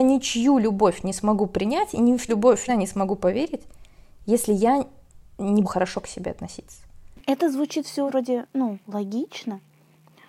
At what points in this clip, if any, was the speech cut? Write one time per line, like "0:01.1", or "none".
0:02.3
0:02.7
0:05.6
0:08.1